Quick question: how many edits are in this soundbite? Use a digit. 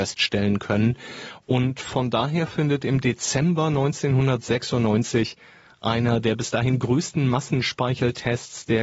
0